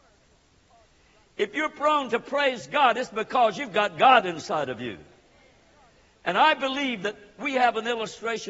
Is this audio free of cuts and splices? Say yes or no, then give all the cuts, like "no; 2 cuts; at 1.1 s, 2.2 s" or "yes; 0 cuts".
yes; 0 cuts